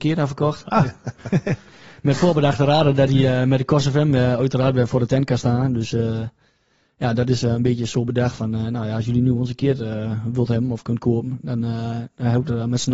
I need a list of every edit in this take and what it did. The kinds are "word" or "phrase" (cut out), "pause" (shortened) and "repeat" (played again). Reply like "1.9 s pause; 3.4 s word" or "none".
none